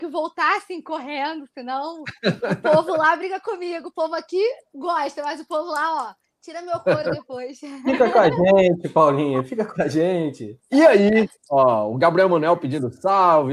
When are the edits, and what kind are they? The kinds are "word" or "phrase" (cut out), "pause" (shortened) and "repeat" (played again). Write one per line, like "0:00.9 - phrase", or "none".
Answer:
0:10.6 - pause
0:11.4 - pause